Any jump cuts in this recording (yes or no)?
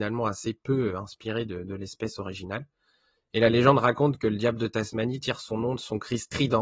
no